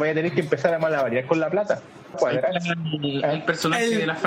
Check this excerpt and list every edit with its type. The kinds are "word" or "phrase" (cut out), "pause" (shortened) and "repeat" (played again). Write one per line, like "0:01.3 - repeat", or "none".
0:02.1 - phrase